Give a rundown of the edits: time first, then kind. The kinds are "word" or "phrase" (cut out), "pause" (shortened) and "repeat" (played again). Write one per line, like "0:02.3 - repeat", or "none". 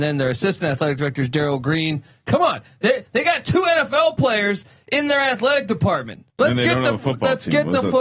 0:06.3 - pause